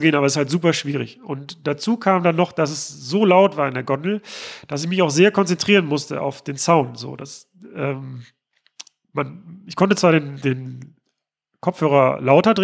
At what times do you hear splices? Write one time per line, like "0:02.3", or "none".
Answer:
none